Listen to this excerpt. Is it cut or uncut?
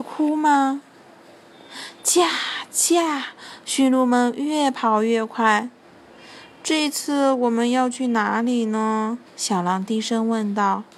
cut